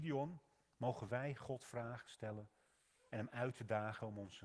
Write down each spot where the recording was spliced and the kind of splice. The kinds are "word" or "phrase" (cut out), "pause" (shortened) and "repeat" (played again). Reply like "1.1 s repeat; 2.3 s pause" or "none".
none